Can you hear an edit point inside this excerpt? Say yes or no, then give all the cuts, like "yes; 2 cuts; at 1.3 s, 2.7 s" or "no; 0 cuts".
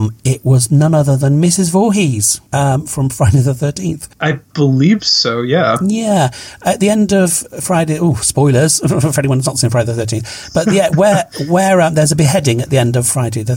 yes; 1 cut; at 2.5 s